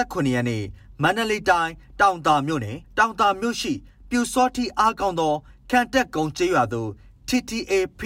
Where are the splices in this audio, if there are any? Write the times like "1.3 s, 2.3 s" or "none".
2.8 s

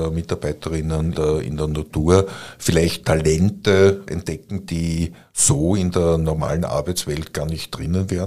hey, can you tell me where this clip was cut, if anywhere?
1.1 s, 3.0 s, 4.1 s, 4.7 s

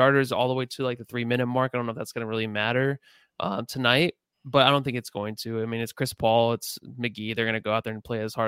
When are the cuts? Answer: none

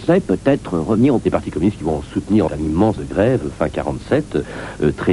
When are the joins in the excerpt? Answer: 1.2 s, 2.5 s, 3.0 s

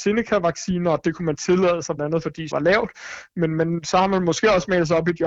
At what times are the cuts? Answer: 2.0 s, 2.5 s

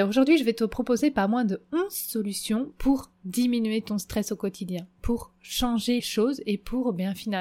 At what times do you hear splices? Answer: 6.0 s

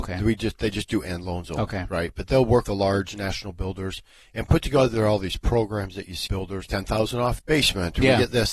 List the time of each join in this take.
2.7 s, 6.3 s, 6.7 s, 7.4 s

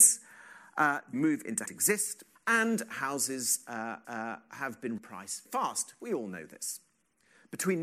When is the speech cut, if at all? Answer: 1.1 s, 1.7 s, 2.4 s, 4.0 s, 5.0 s, 5.5 s

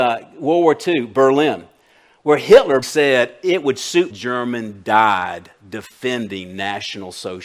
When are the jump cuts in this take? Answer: 2.8 s, 4.1 s

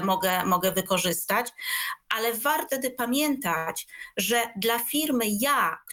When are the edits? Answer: 2.7 s

